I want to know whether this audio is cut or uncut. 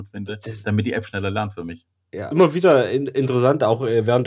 cut